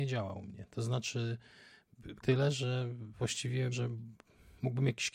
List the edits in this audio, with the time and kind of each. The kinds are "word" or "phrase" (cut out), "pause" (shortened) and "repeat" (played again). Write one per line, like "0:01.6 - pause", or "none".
0:02.2 - phrase
0:03.7 - word